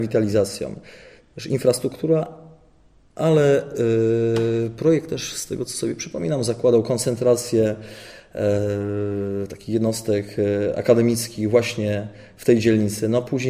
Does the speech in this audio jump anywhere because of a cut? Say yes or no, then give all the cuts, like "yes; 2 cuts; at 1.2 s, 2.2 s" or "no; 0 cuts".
no; 0 cuts